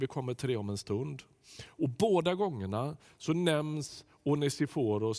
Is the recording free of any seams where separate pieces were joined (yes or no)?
yes